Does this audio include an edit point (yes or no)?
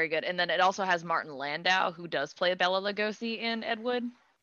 no